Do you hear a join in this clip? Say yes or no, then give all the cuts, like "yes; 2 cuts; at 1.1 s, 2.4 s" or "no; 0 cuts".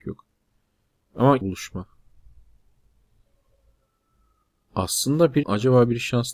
yes; 2 cuts; at 1.4 s, 5.4 s